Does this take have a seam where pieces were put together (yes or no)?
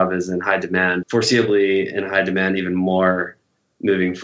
yes